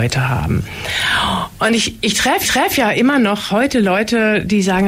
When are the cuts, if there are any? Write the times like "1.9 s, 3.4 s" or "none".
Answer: 2.4 s, 3.5 s